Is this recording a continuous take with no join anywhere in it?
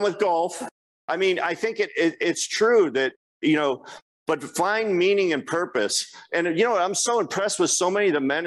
yes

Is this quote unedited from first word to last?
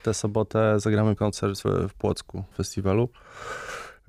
no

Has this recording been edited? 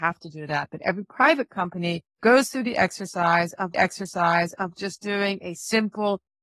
yes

